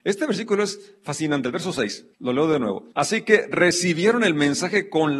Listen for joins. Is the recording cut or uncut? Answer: cut